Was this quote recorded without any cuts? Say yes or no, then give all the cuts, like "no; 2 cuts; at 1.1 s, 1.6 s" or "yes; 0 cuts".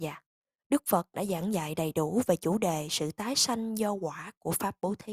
yes; 0 cuts